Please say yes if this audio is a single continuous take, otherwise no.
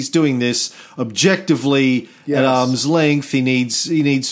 yes